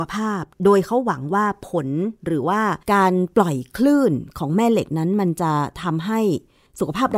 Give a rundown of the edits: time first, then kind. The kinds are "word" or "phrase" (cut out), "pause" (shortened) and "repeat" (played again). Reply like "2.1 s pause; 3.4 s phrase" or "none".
2.8 s pause